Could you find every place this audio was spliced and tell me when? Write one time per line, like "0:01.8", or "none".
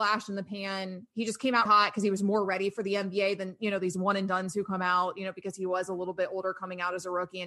0:01.7